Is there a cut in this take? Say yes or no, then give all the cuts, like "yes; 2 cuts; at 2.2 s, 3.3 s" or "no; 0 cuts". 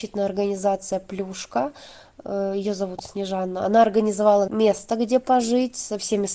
yes; 1 cut; at 4.5 s